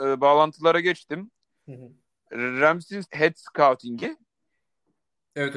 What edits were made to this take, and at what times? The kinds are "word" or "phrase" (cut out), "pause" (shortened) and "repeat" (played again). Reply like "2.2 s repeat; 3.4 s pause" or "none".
3.0 s word